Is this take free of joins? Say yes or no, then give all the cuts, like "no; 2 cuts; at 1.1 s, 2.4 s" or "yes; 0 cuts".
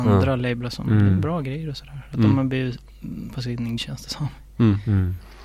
no; 2 cuts; at 3.3 s, 3.8 s